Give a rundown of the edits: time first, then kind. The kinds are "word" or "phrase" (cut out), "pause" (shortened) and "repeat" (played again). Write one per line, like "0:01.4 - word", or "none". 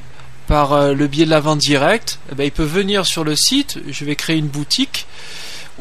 none